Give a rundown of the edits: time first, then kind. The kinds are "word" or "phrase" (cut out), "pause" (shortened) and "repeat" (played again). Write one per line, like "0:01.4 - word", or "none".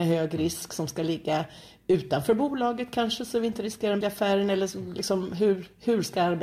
0:04.0 - word